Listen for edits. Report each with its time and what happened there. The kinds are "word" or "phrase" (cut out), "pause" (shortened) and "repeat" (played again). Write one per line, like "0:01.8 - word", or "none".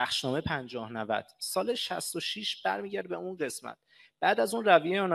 none